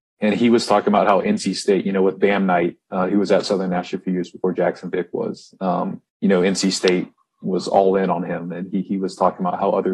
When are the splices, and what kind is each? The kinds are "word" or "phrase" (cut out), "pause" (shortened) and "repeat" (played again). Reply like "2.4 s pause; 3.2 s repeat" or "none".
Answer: 6.1 s pause